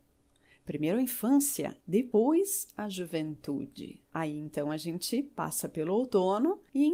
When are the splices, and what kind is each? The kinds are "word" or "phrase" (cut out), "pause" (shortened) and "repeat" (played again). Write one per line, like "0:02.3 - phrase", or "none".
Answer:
0:01.8 - pause
0:04.1 - pause